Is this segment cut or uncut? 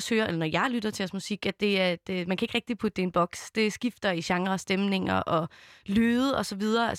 uncut